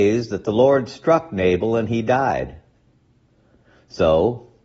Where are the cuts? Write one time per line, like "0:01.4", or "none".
none